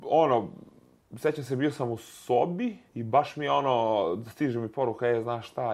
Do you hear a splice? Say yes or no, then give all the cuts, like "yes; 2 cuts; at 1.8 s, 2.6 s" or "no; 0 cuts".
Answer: yes; 2 cuts; at 1.0 s, 2.9 s